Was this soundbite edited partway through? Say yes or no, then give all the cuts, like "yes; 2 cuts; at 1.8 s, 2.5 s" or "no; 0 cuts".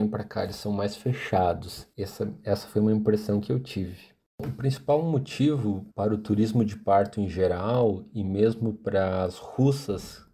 yes; 1 cut; at 5.9 s